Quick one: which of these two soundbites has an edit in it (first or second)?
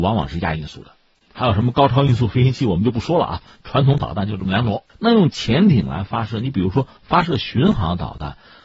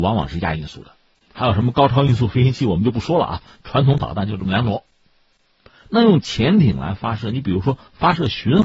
first